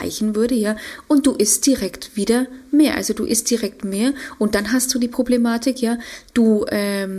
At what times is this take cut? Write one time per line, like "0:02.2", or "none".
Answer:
none